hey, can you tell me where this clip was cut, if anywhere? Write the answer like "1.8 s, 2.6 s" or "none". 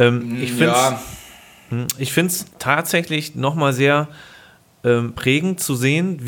2.5 s